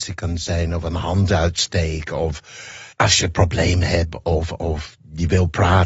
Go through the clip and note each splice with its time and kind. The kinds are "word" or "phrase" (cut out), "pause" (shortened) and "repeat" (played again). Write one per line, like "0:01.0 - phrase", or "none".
0:02.9 - pause